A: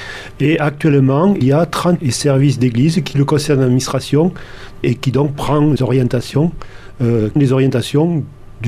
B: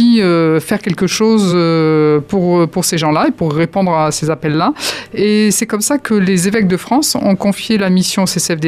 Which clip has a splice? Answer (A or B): A